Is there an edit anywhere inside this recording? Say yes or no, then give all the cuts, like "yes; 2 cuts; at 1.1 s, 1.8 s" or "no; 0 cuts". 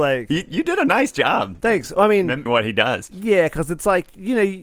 yes; 1 cut; at 2.5 s